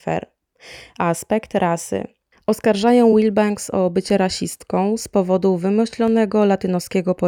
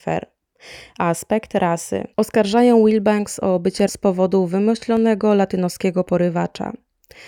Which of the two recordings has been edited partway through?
second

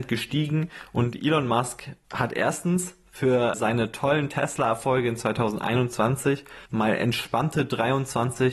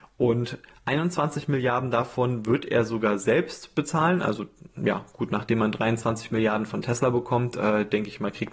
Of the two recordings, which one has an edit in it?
first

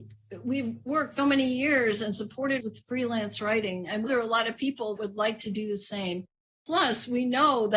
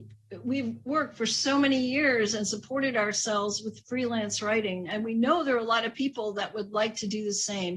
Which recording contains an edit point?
first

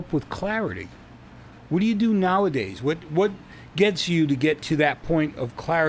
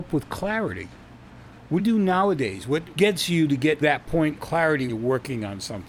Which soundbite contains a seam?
second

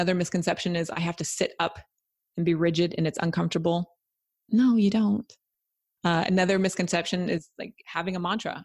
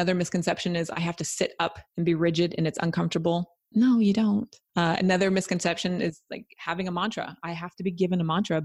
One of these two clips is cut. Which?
second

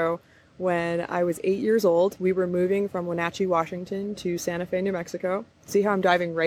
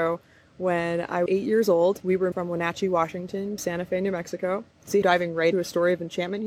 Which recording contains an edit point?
second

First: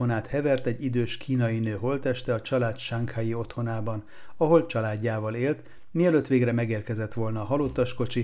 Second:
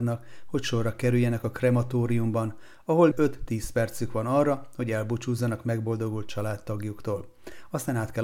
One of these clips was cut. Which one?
second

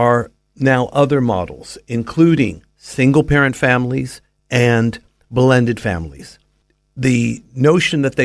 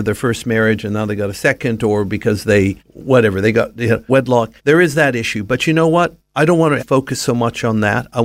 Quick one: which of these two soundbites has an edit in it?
second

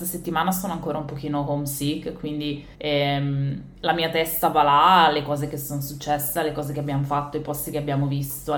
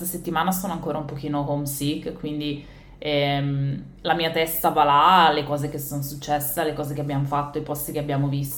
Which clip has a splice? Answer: first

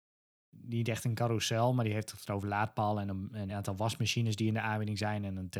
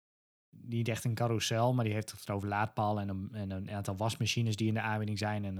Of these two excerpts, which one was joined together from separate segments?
first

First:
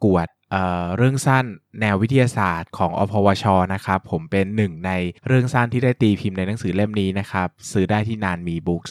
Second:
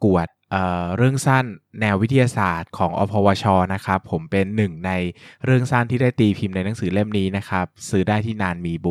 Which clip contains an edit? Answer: first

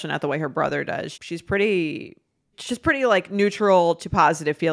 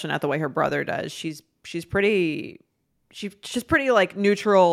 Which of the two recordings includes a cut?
first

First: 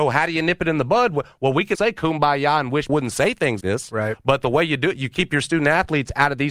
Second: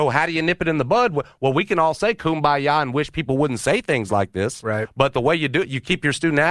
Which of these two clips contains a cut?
first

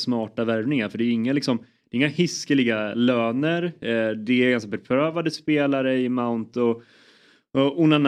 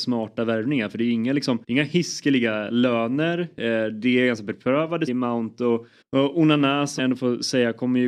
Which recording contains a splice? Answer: second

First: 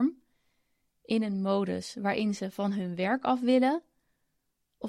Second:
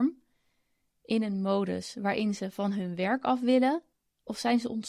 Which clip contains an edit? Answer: second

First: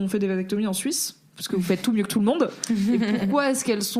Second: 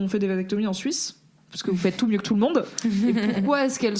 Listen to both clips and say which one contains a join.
first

